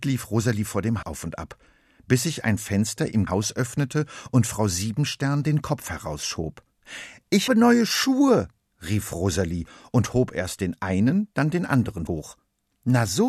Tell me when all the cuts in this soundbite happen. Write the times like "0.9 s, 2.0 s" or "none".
1.0 s, 3.3 s, 7.5 s, 12.1 s